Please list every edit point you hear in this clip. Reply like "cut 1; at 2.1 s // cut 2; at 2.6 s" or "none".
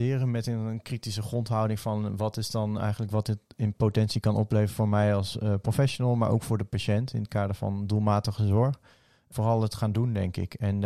none